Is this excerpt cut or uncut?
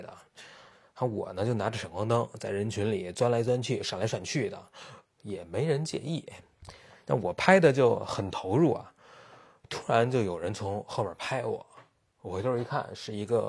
uncut